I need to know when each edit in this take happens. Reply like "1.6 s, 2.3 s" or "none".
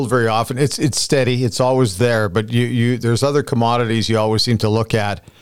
none